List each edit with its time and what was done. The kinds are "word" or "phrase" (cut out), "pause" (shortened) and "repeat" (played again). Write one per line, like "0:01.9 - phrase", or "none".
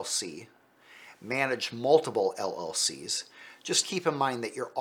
0:03.8 - word